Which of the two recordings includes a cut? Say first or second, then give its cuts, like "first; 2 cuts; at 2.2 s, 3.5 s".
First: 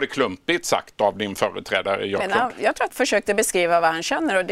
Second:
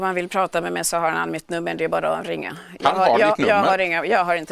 first; 2 cuts; at 2.2 s, 2.9 s